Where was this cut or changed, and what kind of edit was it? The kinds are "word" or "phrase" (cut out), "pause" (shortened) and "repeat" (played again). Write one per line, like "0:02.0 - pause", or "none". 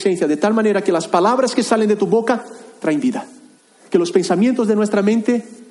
0:03.6 - pause